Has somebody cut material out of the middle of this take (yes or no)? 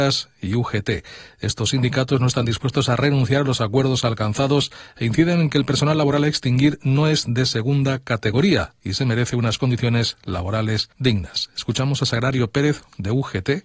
yes